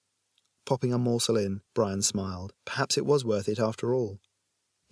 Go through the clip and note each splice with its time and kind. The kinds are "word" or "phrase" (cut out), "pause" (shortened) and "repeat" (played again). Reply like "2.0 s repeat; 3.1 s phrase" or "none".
1.7 s pause; 2.5 s pause